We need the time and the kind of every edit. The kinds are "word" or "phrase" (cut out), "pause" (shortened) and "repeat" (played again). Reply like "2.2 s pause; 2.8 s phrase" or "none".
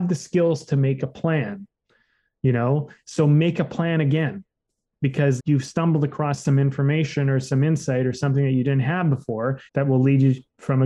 5.4 s word; 9.7 s pause